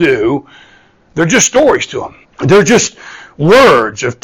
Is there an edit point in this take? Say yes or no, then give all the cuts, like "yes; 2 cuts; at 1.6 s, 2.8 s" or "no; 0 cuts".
yes; 1 cut; at 2.2 s